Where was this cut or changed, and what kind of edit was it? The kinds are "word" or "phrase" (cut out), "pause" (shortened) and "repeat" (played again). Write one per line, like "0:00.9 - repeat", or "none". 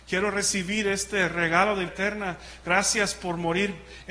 0:01.9 - word